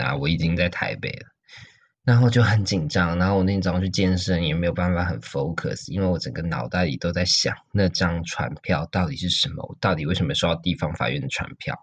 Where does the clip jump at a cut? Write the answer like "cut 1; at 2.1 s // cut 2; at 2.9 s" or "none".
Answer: cut 1; at 1.9 s